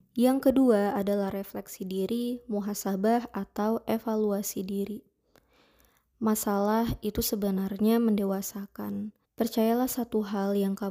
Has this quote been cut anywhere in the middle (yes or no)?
yes